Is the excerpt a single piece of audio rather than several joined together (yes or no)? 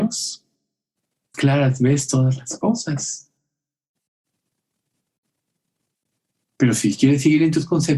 no